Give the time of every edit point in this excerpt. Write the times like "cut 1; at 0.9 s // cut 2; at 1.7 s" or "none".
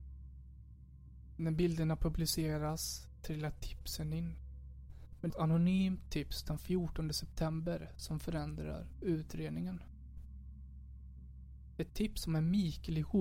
cut 1; at 5.3 s